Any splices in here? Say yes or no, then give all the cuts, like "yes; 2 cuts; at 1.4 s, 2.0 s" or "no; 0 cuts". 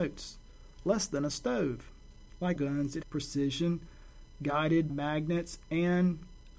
yes; 3 cuts; at 2.6 s, 3.0 s, 4.9 s